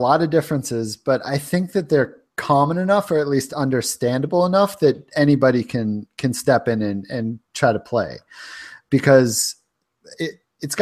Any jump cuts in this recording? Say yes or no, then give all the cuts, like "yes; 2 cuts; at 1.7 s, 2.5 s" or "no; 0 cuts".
no; 0 cuts